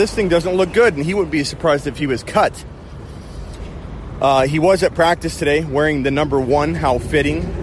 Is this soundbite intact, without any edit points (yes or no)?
yes